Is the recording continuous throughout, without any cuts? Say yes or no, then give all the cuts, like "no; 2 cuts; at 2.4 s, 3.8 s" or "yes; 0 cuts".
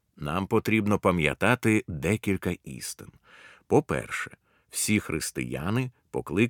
yes; 0 cuts